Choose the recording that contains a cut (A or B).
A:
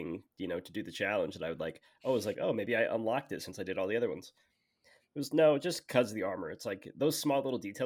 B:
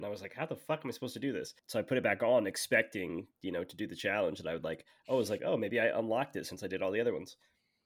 B